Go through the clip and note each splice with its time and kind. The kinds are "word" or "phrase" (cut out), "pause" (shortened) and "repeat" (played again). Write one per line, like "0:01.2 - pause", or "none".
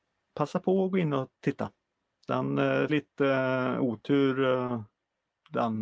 0:02.9 - phrase